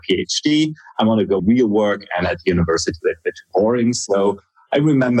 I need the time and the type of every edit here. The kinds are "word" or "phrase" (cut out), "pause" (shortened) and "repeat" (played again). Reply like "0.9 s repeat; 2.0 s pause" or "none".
1.4 s word; 3.0 s word